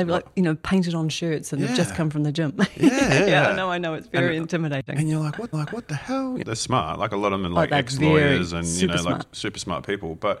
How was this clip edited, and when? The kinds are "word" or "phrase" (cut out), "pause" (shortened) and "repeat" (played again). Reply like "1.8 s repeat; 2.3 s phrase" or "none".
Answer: 5.5 s repeat; 6.4 s phrase